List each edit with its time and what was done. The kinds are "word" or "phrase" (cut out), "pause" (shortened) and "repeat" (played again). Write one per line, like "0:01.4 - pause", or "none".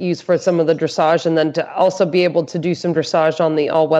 none